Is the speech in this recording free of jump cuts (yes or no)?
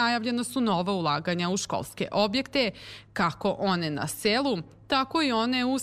yes